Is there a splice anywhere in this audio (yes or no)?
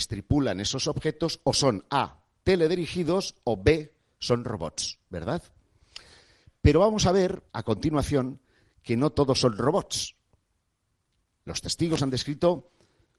yes